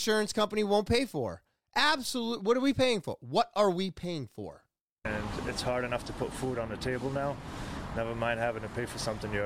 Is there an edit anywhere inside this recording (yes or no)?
no